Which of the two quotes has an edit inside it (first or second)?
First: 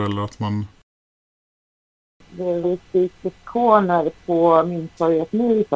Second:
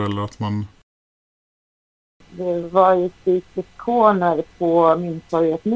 first